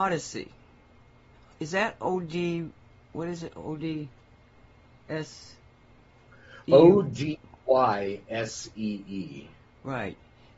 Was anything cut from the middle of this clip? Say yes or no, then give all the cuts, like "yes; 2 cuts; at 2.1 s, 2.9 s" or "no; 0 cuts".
no; 0 cuts